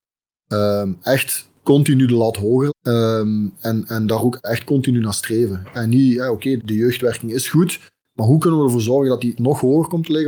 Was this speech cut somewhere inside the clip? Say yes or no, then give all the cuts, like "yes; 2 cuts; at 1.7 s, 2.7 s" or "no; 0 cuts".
yes; 5 cuts; at 1.6 s, 2.7 s, 4.4 s, 6.6 s, 9.4 s